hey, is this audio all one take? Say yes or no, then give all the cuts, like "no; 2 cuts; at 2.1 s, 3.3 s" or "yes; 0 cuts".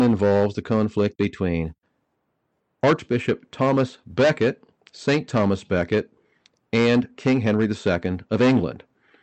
yes; 0 cuts